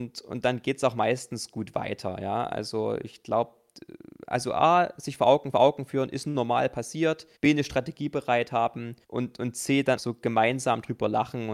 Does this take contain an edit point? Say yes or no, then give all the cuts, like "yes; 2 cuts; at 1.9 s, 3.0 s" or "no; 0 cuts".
yes; 4 cuts; at 5.5 s, 7.4 s, 9.0 s, 10.0 s